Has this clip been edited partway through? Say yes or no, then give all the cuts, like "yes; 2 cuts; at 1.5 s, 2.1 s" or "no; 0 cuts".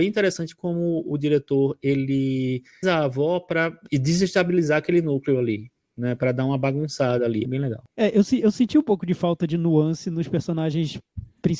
yes; 2 cuts; at 2.8 s, 7.4 s